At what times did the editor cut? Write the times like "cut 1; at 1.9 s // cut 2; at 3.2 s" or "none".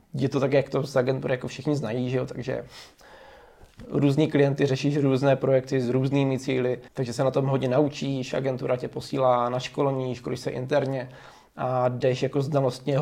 cut 1; at 6.9 s